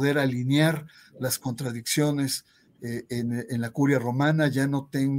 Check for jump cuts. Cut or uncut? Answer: uncut